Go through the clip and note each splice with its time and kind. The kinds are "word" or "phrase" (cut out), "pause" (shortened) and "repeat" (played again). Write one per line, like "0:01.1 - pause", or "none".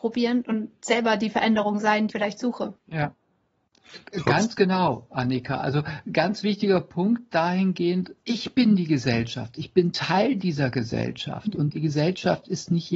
0:02.1 - word
0:02.8 - pause
0:08.2 - pause